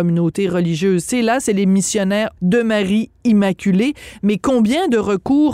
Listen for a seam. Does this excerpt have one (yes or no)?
yes